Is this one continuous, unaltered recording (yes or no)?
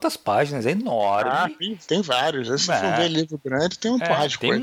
yes